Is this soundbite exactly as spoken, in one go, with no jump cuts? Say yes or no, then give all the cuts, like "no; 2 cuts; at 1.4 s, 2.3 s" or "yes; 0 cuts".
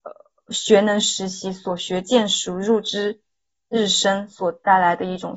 yes; 0 cuts